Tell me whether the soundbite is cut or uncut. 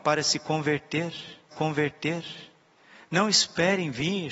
cut